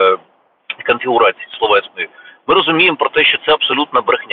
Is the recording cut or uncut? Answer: uncut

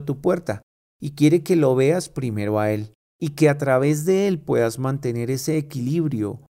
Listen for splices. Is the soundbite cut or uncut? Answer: cut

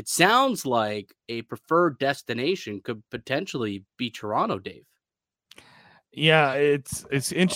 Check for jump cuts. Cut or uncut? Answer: uncut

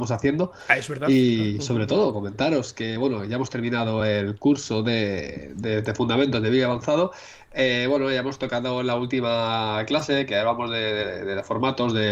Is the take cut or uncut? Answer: uncut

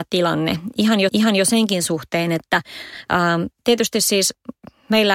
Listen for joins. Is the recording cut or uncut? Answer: cut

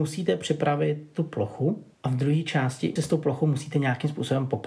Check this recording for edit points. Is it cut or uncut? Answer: cut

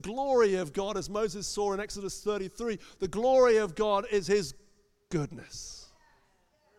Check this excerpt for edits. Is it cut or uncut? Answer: uncut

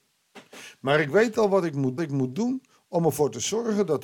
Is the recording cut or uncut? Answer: cut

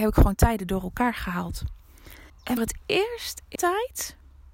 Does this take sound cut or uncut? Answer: cut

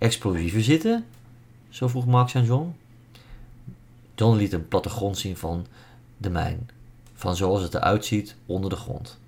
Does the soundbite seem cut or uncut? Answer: uncut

